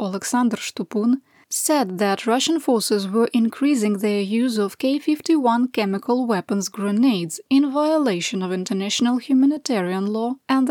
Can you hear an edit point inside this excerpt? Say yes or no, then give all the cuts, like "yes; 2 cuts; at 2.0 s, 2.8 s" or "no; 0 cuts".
no; 0 cuts